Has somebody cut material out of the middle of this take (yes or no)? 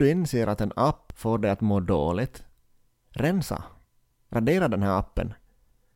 no